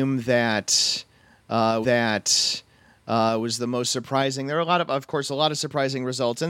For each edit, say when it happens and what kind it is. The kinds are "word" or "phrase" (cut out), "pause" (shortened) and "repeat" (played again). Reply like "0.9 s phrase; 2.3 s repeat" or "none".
1.8 s repeat